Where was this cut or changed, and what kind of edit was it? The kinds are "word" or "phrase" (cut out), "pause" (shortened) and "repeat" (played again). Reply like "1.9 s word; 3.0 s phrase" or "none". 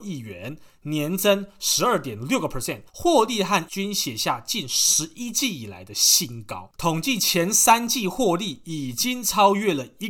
2.9 s pause; 3.7 s word